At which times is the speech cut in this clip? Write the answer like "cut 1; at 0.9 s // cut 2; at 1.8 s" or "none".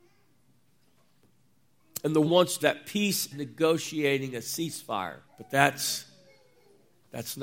cut 1; at 2.2 s // cut 2; at 2.6 s // cut 3; at 3.3 s // cut 4; at 5.2 s